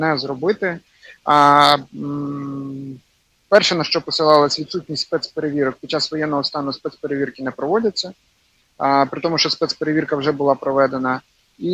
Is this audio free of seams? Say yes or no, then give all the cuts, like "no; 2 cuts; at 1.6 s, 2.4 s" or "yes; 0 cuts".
yes; 0 cuts